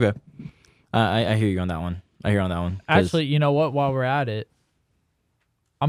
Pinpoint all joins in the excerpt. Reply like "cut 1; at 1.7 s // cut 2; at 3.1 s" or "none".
none